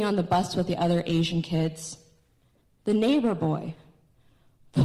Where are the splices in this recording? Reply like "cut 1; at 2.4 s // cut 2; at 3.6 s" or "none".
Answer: none